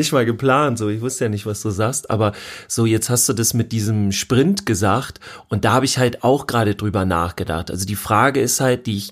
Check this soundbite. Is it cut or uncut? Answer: uncut